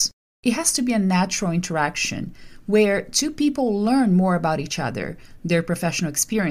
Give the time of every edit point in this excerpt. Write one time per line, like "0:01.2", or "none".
none